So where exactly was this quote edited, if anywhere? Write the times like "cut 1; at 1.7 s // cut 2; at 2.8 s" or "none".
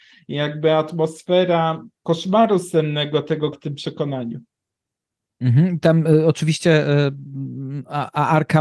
cut 1; at 1.9 s // cut 2; at 3.5 s